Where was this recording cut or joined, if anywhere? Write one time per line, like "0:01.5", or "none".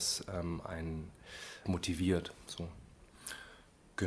0:01.6